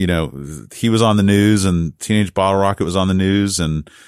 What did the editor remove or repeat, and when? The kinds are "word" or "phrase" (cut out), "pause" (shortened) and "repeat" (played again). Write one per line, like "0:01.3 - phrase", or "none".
none